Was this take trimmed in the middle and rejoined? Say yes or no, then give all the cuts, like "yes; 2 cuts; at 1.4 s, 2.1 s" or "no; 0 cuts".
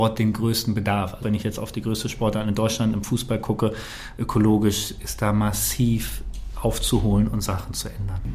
yes; 1 cut; at 1.2 s